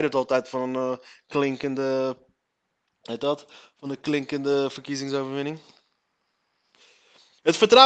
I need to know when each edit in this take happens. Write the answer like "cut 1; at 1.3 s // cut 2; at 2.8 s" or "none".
none